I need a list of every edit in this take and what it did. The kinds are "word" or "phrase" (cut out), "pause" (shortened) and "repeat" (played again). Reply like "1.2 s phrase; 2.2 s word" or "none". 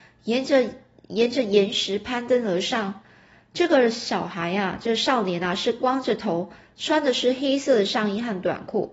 none